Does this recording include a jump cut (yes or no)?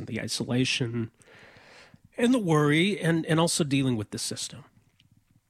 no